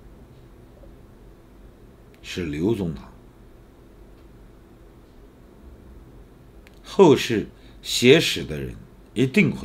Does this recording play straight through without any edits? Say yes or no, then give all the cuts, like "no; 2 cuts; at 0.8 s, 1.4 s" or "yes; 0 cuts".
yes; 0 cuts